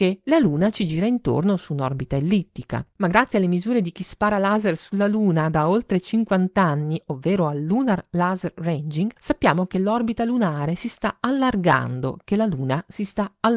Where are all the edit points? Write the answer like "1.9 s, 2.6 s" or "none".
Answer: 2.9 s, 9.2 s

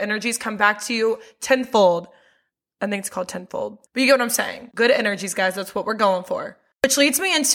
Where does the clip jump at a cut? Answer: 3.9 s

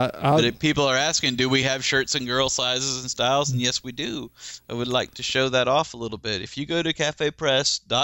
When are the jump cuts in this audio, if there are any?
none

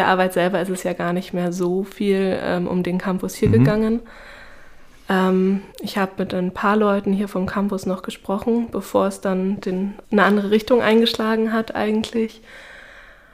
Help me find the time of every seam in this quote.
5.7 s, 10.0 s

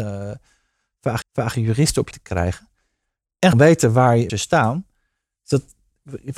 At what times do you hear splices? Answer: 1.2 s, 2.1 s, 3.5 s, 4.3 s

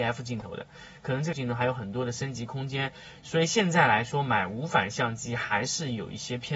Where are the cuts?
1.3 s

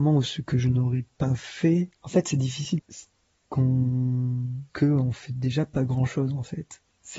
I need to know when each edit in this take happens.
2.0 s, 2.8 s, 4.7 s

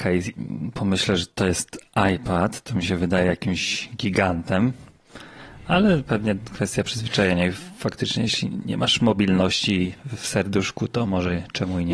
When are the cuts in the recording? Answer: none

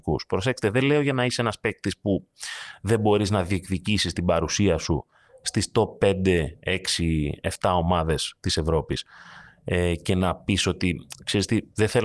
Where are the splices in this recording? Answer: none

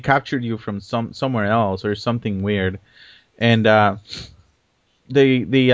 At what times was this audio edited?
none

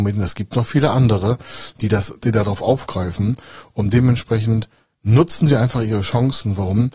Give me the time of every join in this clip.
none

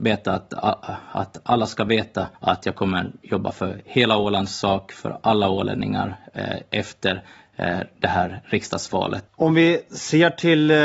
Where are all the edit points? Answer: 2.4 s, 9.3 s

